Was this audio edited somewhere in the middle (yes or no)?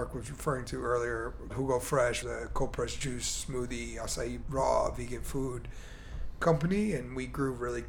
yes